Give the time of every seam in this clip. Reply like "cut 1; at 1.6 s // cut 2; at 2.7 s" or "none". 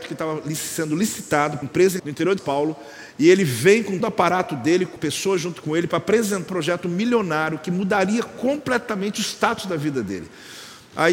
cut 1; at 1.6 s // cut 2; at 2.0 s // cut 3; at 2.4 s // cut 4; at 4.0 s // cut 5; at 5.0 s // cut 6; at 6.5 s